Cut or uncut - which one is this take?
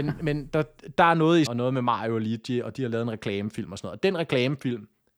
cut